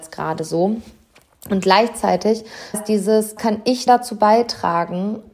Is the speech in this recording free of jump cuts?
no; 3 cuts; at 2.7 s, 3.4 s, 3.9 s

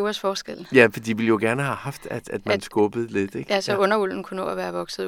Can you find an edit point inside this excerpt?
no; 0 cuts

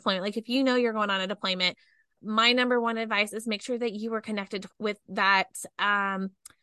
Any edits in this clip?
yes; 2 cuts; at 2.2 s, 4.7 s

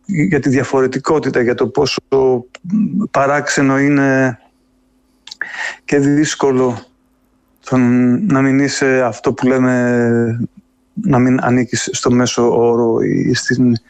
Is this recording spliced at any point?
no; 0 cuts

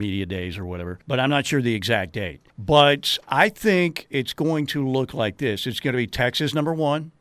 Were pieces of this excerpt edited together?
yes; 2 cuts; at 1.0 s, 2.5 s

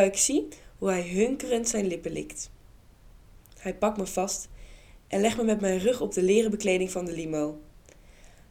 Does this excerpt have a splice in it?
no; 0 cuts

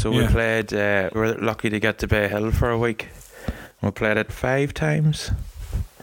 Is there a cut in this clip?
yes; 2 cuts; at 1.1 s, 4.3 s

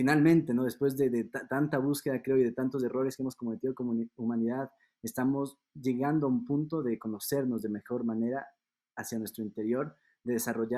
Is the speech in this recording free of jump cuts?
yes; 0 cuts

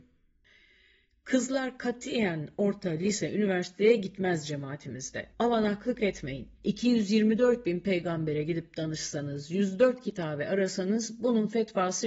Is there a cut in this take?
yes; 2 cuts; at 5.3 s, 6.5 s

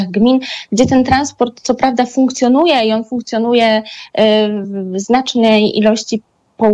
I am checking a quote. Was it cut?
no; 0 cuts

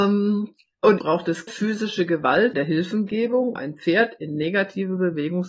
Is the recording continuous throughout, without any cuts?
no; 4 cuts; at 1.0 s, 1.5 s, 2.5 s, 3.6 s

